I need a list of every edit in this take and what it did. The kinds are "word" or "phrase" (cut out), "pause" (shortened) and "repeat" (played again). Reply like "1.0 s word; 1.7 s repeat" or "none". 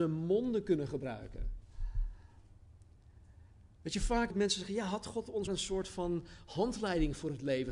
4.3 s word; 5.5 s word